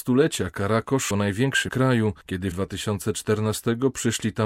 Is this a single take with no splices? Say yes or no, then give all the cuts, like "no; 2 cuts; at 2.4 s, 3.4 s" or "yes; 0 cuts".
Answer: no; 4 cuts; at 1.1 s, 1.7 s, 2.2 s, 2.5 s